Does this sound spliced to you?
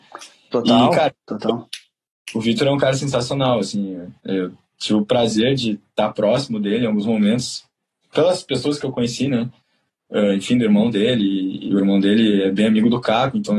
no; 0 cuts

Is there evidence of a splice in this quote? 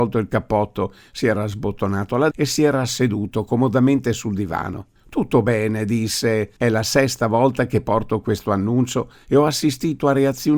yes; 3 cuts; at 2.3 s, 5.0 s, 6.6 s

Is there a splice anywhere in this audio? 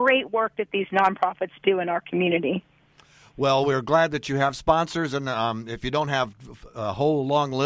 no; 0 cuts

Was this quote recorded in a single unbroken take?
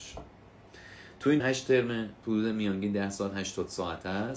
no; 2 cuts; at 1.4 s, 2.2 s

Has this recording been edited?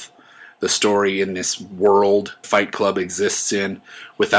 yes; 1 cut; at 2.4 s

